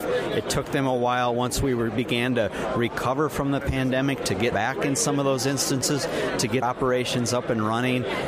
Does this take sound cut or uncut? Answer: cut